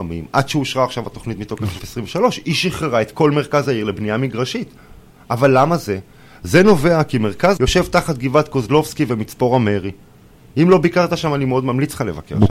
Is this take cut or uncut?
cut